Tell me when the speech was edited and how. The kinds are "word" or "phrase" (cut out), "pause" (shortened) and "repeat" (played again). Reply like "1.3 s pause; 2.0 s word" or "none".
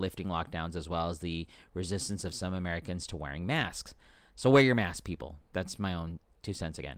none